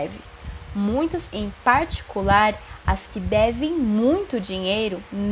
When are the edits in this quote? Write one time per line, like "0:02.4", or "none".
0:01.3